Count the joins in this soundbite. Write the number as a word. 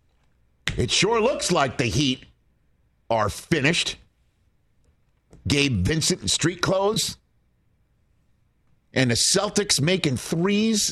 zero